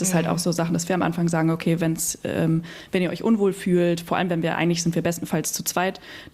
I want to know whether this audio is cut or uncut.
uncut